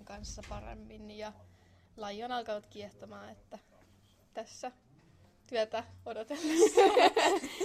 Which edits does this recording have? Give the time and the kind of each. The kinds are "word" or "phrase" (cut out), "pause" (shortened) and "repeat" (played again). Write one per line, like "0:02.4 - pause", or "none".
none